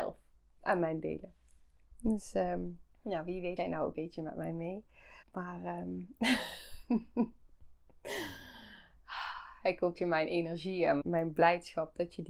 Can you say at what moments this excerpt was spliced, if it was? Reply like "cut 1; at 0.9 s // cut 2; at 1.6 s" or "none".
cut 1; at 2.9 s // cut 2; at 3.6 s // cut 3; at 3.9 s // cut 4; at 5.2 s // cut 5; at 9.9 s // cut 6; at 11.0 s

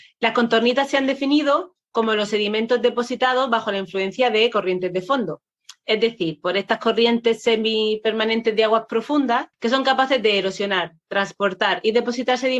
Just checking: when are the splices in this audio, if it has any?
cut 1; at 9.5 s

